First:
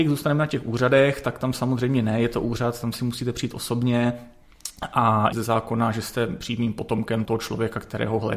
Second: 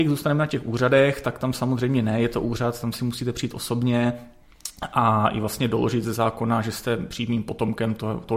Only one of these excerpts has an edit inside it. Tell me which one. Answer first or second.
first